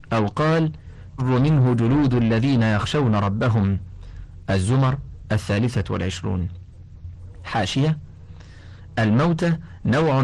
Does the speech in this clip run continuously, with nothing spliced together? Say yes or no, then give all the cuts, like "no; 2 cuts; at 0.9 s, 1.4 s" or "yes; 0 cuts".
no; 1 cut; at 1.2 s